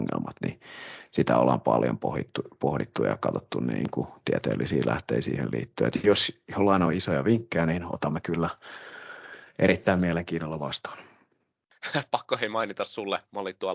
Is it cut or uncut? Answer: uncut